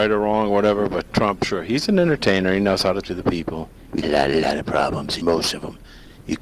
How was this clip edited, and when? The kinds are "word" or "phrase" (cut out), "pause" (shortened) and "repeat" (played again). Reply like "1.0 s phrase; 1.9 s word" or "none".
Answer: 1.1 s word; 3.0 s word; 4.0 s word; 5.2 s word